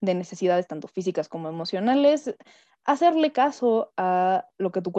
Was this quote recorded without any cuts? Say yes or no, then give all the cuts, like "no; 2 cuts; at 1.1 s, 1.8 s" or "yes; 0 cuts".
yes; 0 cuts